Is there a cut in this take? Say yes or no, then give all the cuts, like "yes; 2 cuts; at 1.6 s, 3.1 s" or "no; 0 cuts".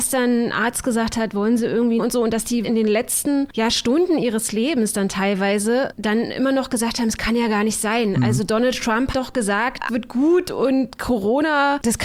yes; 4 cuts; at 2.0 s, 2.6 s, 9.1 s, 9.9 s